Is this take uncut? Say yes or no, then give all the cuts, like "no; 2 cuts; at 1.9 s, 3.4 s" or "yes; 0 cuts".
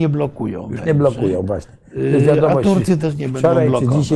yes; 0 cuts